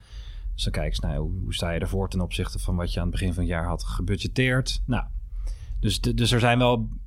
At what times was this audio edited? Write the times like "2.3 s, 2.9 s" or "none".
none